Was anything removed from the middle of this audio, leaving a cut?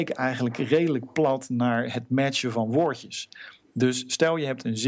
no; 0 cuts

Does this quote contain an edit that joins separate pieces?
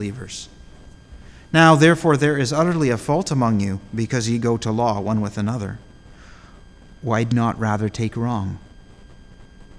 yes; 1 cut; at 7.3 s

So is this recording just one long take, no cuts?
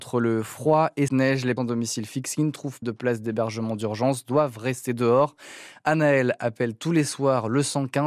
no; 3 cuts; at 1.1 s, 1.6 s, 2.8 s

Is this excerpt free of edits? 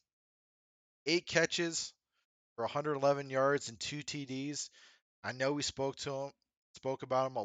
yes; 0 cuts

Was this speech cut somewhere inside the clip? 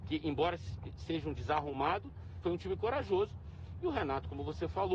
yes; 2 cuts; at 1.3 s, 2.4 s

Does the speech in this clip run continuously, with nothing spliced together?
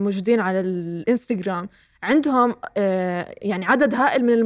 yes; 0 cuts

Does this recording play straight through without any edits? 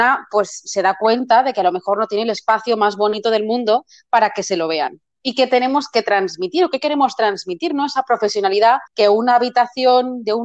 no; 1 cut; at 8.9 s

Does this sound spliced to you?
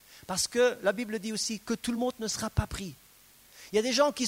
no; 0 cuts

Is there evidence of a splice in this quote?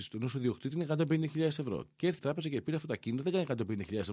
yes; 1 cut; at 2.2 s

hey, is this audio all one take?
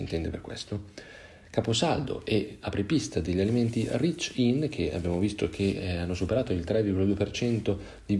yes; 0 cuts

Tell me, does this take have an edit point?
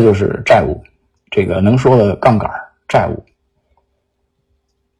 no; 0 cuts

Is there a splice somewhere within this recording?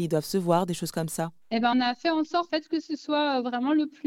yes; 2 cuts; at 1.7 s, 2.5 s

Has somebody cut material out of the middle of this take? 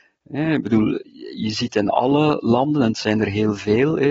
no; 0 cuts

